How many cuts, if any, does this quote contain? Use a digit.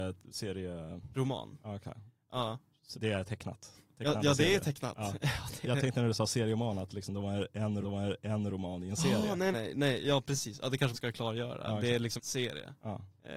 5